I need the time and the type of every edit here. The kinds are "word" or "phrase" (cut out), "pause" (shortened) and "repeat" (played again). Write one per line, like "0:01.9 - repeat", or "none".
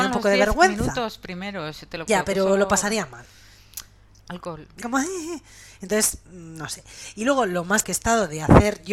0:02.1 - word
0:04.8 - word
0:07.8 - word

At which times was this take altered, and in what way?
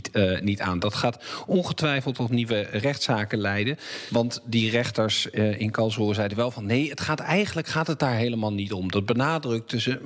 none

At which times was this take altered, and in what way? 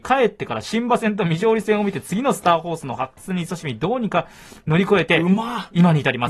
none

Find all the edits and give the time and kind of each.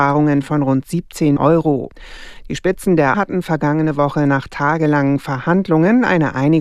0:01.4 - word
0:03.1 - word

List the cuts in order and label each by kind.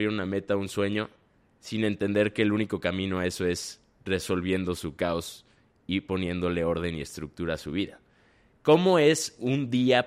none

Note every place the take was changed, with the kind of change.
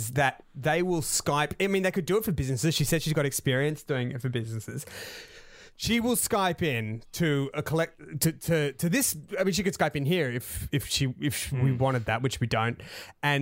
none

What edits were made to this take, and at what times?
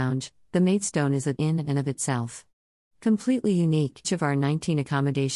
0:01.4 - word
0:04.0 - word

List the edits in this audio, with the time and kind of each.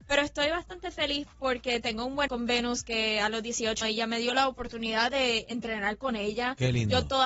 0:02.3 - word
0:03.8 - word

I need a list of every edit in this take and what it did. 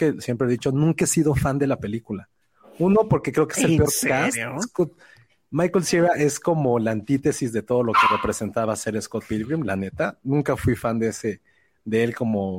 none

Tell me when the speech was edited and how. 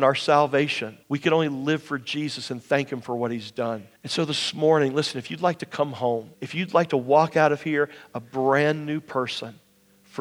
0:01.0 - pause
0:04.0 - pause
0:06.3 - pause

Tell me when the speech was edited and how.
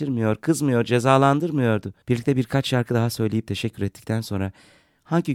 0:02.0 - pause

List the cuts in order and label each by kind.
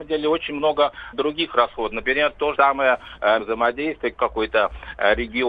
0:01.1 - word
0:02.5 - word
0:03.4 - word
0:04.1 - phrase

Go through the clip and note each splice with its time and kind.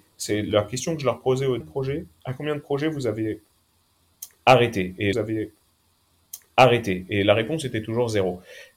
0:01.6 - phrase
0:02.2 - pause
0:05.1 - repeat

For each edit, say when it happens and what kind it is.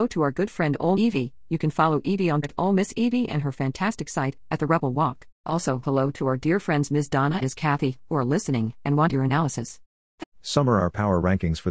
0:00.9 - word
0:02.4 - word
0:05.3 - pause
0:07.4 - word
0:09.1 - phrase
0:10.3 - pause

